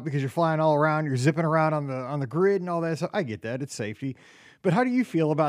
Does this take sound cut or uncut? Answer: uncut